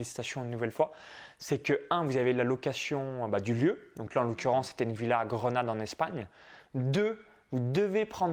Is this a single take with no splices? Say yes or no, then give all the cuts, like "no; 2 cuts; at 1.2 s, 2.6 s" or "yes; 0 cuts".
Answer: yes; 0 cuts